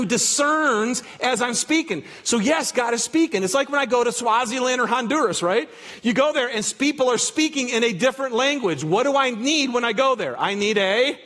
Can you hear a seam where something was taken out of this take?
no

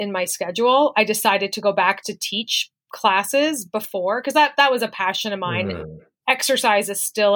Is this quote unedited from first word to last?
no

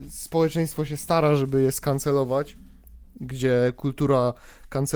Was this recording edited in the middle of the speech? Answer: no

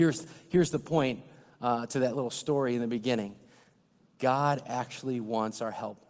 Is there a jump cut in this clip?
no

